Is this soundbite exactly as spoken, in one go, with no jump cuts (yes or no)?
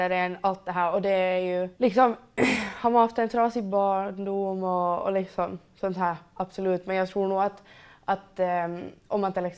no